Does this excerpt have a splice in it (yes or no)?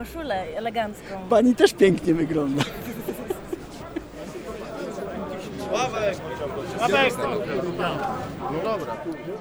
no